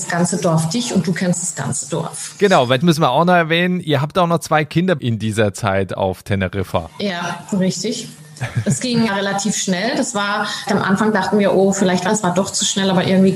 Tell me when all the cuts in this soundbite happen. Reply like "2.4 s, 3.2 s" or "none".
2.8 s, 5.0 s, 9.1 s, 10.7 s, 12.1 s